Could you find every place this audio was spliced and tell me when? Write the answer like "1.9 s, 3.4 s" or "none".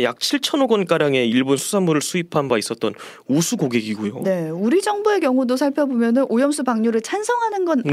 none